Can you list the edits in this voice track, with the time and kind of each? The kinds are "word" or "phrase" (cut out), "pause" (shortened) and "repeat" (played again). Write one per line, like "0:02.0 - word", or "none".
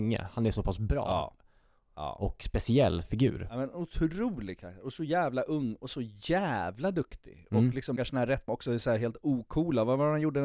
0:08.0 - word
0:08.5 - word